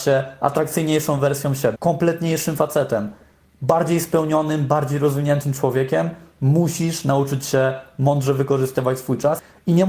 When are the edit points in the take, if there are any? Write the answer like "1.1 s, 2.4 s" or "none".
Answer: 1.8 s